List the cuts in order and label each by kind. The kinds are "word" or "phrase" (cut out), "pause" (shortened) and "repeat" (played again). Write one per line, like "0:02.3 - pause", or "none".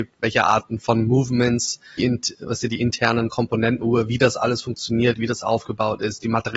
0:02.0 - word
0:03.8 - word